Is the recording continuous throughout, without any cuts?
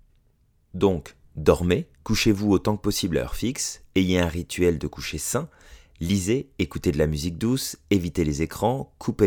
no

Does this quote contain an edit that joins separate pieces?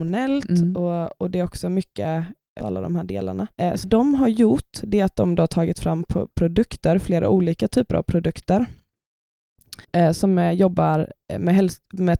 yes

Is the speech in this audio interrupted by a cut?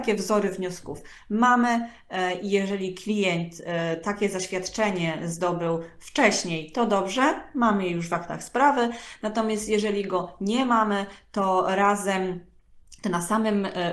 no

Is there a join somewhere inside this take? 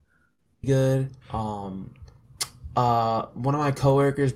yes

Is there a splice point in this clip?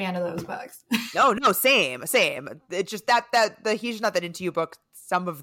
no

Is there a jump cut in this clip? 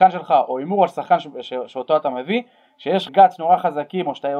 yes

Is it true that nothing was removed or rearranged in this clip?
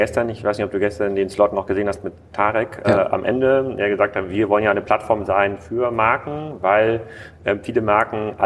no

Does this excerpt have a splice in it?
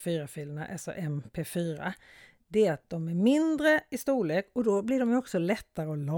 no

